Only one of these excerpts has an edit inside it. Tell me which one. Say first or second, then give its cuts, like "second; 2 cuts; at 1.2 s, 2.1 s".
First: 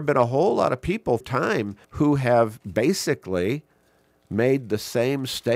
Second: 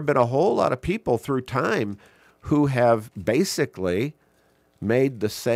first; 2 cuts; at 1.2 s, 1.8 s